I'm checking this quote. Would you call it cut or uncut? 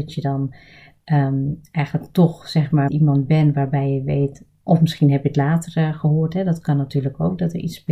cut